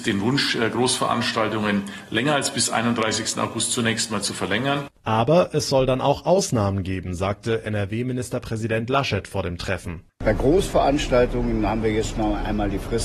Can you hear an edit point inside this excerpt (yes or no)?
yes